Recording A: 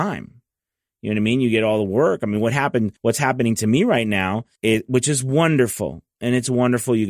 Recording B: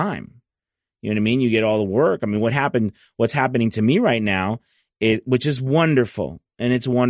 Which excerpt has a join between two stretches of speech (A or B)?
A